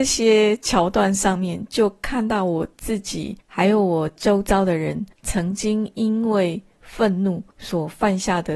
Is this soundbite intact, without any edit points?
no; 3 cuts; at 3.4 s, 5.1 s, 7.5 s

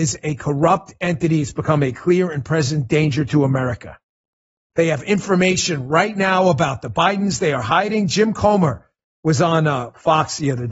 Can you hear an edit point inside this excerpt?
no; 0 cuts

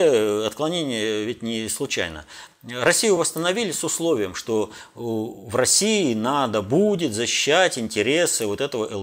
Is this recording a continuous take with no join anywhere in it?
yes; 0 cuts

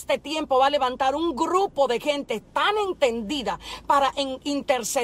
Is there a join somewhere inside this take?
no; 0 cuts

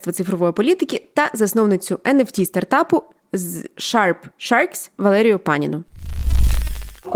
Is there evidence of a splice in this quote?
no; 0 cuts

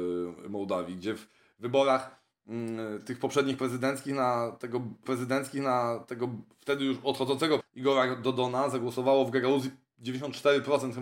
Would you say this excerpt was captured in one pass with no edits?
no; 2 cuts; at 5.1 s, 7.6 s

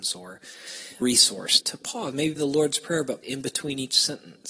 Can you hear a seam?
yes; 4 cuts; at 1.0 s, 1.6 s, 2.4 s, 3.2 s

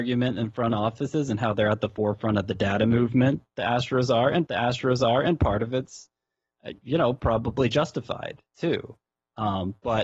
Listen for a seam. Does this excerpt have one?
yes; 1 cut; at 4.5 s

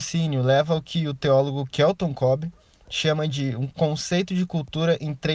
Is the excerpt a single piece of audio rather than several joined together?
yes; 0 cuts

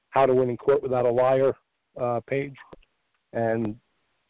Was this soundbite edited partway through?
no; 0 cuts

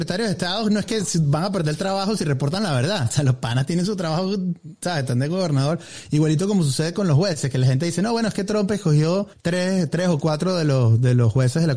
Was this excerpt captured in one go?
no; 1 cut; at 9.3 s

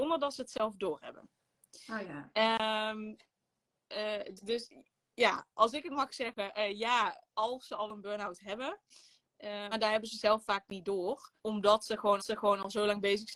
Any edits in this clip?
yes; 6 cuts; at 4.4 s, 7.3 s, 7.9 s, 9.7 s, 11.4 s, 12.2 s

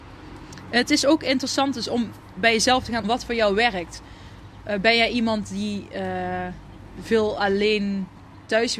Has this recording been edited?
yes; 1 cut; at 3.0 s

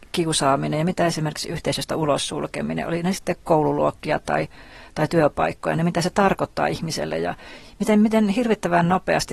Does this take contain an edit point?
no; 0 cuts

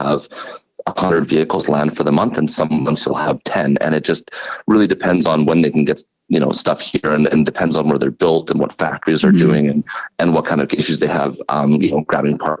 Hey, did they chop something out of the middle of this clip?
no; 0 cuts

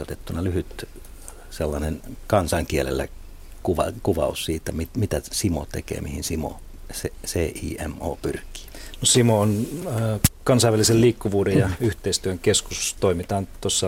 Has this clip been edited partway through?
no; 0 cuts

